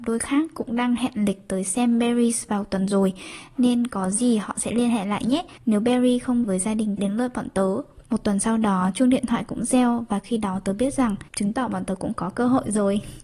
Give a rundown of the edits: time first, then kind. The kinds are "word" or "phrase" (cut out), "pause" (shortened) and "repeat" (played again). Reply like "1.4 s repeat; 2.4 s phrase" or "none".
5.6 s pause; 6.4 s word; 7.0 s phrase; 8.1 s pause; 11.3 s pause